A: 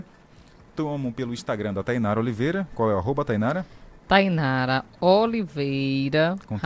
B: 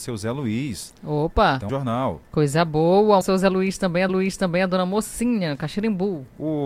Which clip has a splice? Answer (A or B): B